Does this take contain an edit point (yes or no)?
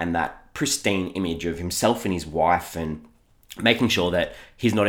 no